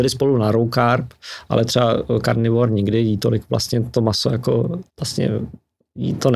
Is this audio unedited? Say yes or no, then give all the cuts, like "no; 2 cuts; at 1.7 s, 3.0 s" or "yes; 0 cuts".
no; 1 cut; at 4.9 s